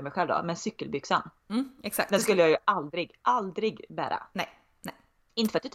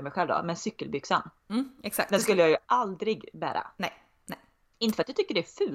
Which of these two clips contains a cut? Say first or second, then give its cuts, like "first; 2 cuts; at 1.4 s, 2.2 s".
second; 1 cut; at 2.6 s